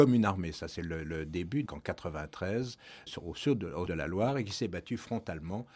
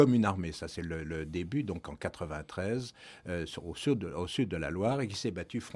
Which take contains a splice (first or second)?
first